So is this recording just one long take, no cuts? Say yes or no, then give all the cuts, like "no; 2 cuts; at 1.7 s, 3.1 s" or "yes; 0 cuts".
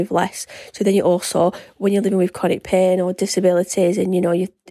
yes; 0 cuts